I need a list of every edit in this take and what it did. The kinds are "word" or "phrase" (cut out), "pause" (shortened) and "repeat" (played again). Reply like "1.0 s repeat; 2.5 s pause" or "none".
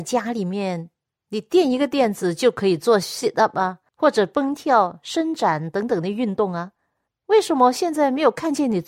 none